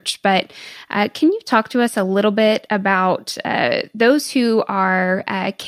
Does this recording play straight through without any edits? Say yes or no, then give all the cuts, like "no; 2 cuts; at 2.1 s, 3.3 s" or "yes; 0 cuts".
yes; 0 cuts